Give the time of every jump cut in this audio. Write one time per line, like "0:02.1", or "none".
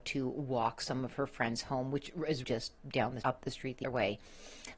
0:02.4
0:02.8
0:03.2
0:03.8